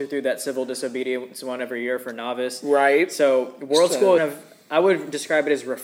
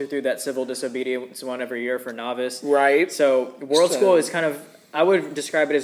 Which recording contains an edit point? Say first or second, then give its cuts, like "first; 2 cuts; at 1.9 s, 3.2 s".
first; 1 cut; at 4.2 s